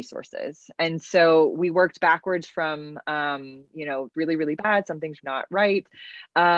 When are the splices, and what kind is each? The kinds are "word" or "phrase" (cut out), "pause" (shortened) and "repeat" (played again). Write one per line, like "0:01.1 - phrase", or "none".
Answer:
0:04.1 - word
0:05.2 - word